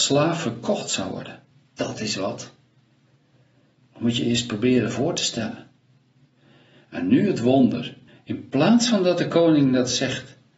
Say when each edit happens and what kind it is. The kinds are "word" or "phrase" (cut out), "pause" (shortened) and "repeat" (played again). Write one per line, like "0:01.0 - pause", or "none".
0:01.5 - pause
0:08.1 - pause